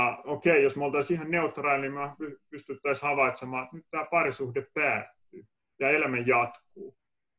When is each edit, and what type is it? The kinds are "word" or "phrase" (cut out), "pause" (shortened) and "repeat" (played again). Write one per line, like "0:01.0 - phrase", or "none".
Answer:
none